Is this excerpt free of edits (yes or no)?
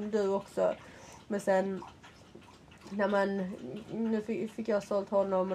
yes